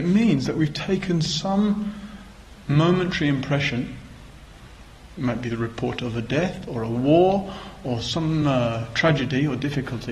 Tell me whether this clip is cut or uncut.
uncut